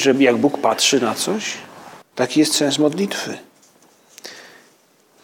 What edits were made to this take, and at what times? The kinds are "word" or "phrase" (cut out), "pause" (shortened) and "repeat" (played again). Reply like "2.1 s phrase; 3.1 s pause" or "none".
2.0 s pause